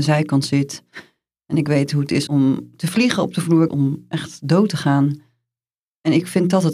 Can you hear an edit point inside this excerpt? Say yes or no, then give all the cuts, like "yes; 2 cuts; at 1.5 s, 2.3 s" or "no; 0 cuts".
yes; 2 cuts; at 2.3 s, 3.7 s